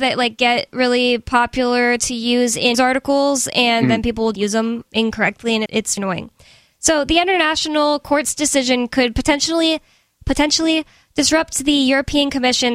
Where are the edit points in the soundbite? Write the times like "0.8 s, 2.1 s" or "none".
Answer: 2.7 s, 4.3 s, 5.7 s, 6.0 s